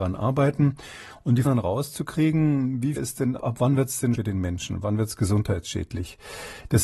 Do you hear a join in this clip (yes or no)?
yes